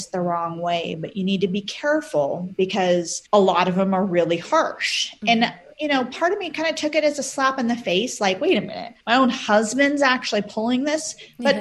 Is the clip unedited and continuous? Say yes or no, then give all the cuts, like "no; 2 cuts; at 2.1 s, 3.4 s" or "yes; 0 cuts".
no; 2 cuts; at 3.3 s, 9.0 s